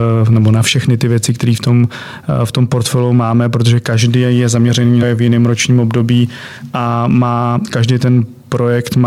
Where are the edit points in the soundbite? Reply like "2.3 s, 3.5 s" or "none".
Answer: 5.0 s